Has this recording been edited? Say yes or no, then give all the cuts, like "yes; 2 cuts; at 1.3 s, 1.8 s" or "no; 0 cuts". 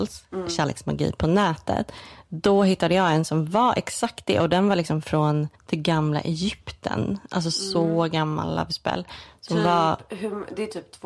yes; 1 cut; at 5.5 s